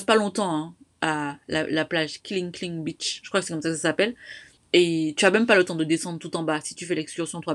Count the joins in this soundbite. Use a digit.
1